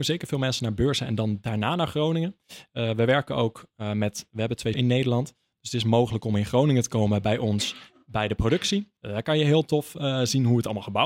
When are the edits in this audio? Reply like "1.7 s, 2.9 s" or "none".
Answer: 4.7 s, 9.0 s